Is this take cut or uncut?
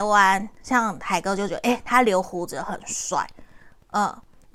uncut